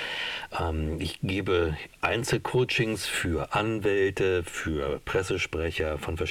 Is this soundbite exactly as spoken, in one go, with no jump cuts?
yes; 0 cuts

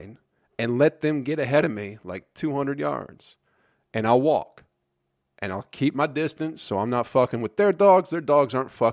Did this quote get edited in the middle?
no; 0 cuts

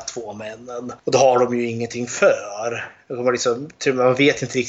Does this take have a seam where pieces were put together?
no; 0 cuts

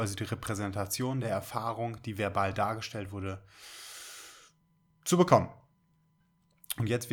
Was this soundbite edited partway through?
no; 0 cuts

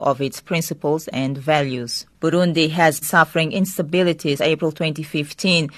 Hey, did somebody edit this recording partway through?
yes; 3 cuts; at 2.1 s, 3.0 s, 4.4 s

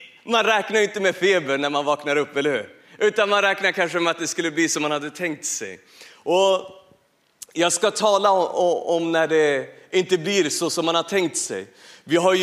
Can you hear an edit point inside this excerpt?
no; 0 cuts

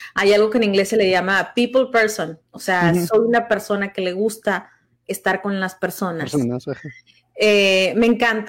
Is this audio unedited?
yes; 0 cuts

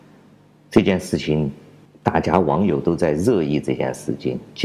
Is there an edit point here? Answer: yes; 1 cut; at 1.9 s

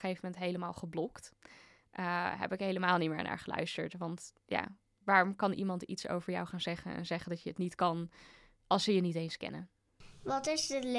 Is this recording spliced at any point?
no; 0 cuts

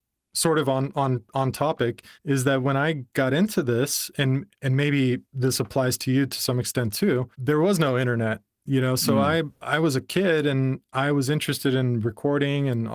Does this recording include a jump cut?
yes; 6 cuts; at 2.1 s, 4.5 s, 5.2 s, 7.3 s, 9.5 s, 10.8 s

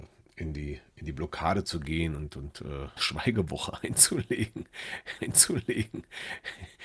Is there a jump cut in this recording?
yes; 2 cuts; at 3.0 s, 5.2 s

